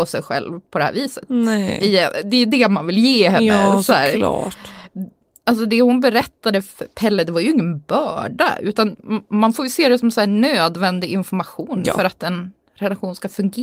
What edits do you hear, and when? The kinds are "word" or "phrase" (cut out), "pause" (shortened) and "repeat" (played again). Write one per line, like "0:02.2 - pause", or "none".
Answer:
none